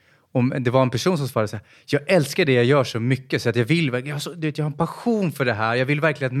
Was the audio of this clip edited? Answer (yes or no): no